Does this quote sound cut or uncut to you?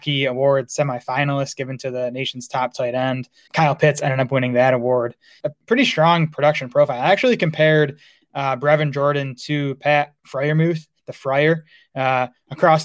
uncut